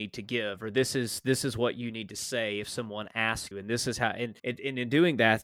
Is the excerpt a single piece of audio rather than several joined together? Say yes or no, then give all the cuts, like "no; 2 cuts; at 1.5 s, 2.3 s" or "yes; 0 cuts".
no; 2 cuts; at 3.5 s, 4.4 s